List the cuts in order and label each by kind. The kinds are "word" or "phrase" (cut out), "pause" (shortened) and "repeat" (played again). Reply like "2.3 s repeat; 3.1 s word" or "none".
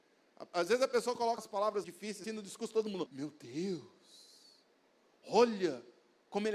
1.4 s word; 1.8 s word; 2.2 s word; 3.1 s word